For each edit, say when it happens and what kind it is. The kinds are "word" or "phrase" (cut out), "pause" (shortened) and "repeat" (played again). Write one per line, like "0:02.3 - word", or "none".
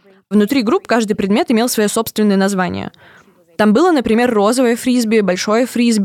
none